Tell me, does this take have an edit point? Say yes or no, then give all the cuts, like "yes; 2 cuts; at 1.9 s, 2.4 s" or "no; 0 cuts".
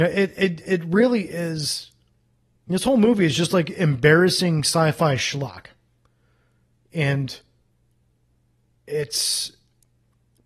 no; 0 cuts